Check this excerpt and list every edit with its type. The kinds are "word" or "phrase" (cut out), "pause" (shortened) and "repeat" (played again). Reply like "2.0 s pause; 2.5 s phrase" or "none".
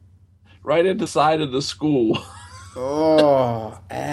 1.1 s word